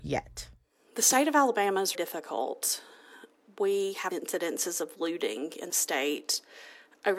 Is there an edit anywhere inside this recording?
yes; 3 cuts; at 1.9 s, 4.1 s, 5.7 s

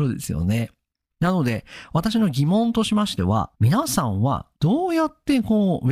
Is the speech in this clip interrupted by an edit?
yes; 2 cuts; at 3.5 s, 4.5 s

